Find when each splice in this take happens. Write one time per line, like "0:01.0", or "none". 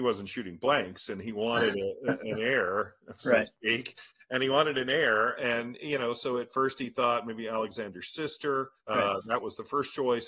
0:08.8